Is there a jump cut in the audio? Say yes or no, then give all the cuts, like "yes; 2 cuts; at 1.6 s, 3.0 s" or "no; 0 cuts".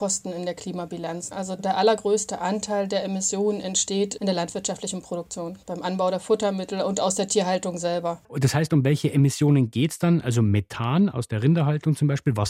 yes; 2 cuts; at 5.6 s, 8.2 s